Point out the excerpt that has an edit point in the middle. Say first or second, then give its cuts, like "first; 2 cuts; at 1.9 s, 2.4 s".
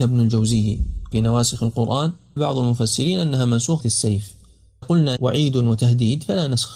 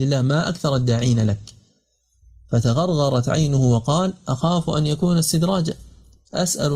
first; 5 cuts; at 1.1 s, 2.4 s, 3.8 s, 4.8 s, 5.2 s